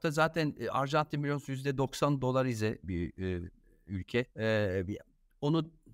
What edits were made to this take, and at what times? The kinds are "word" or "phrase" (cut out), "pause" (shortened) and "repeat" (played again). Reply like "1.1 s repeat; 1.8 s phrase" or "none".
4.3 s pause